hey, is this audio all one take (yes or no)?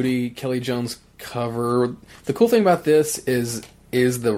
yes